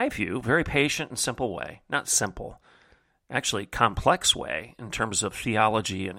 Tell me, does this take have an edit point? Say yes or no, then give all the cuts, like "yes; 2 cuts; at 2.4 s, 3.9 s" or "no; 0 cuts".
no; 0 cuts